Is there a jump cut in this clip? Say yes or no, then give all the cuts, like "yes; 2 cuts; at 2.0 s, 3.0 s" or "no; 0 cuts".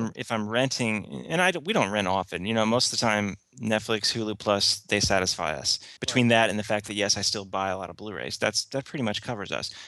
yes; 1 cut; at 6.0 s